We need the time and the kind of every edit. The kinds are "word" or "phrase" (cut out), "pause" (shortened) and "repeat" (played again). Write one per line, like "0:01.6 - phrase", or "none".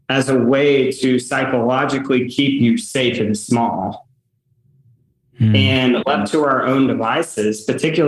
none